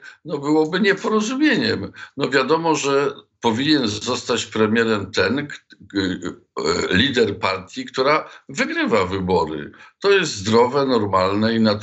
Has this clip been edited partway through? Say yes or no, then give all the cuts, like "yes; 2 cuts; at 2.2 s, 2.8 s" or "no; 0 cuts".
no; 0 cuts